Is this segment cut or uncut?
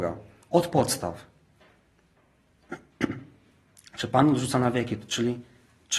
uncut